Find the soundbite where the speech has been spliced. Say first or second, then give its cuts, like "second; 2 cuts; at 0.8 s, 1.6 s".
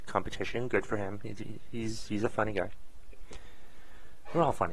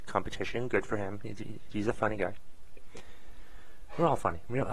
second; 1 cut; at 1.7 s